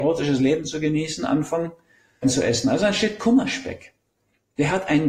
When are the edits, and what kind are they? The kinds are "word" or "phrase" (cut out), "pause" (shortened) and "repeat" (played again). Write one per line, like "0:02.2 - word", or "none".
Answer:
0:02.2 - word